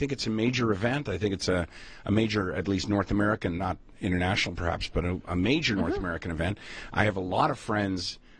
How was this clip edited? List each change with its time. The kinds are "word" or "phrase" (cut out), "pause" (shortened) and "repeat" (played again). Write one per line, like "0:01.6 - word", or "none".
none